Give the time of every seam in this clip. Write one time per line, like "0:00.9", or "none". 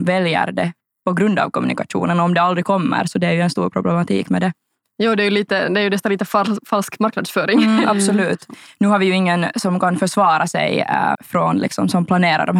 0:11.1